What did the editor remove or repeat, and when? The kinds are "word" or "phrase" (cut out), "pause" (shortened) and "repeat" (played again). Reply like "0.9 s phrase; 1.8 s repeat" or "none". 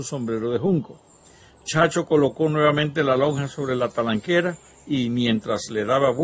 none